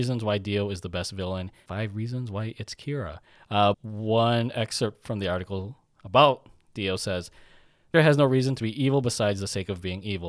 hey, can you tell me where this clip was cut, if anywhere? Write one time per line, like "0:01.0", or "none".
0:01.7
0:03.7
0:07.9